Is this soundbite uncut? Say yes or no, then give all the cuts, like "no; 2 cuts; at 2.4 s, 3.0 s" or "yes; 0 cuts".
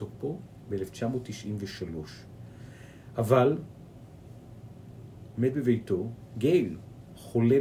yes; 0 cuts